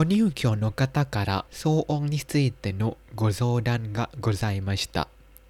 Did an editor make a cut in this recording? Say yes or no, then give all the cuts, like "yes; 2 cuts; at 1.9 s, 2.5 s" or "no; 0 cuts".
yes; 1 cut; at 1.5 s